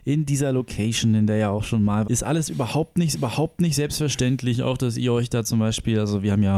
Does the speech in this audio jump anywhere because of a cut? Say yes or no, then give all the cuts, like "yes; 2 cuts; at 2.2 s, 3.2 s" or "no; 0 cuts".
yes; 2 cuts; at 2.0 s, 3.1 s